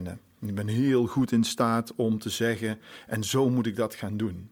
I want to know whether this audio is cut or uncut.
uncut